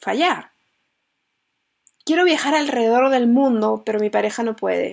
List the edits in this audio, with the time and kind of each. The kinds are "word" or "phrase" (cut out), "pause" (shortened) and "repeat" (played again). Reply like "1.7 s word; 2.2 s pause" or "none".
none